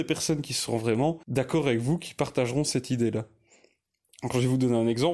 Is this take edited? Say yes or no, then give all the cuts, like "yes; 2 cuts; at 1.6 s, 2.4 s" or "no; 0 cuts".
yes; 1 cut; at 1.2 s